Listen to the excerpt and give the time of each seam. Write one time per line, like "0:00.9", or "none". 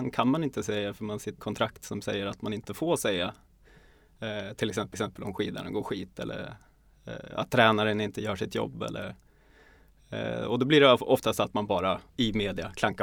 0:01.4
0:04.9
0:12.1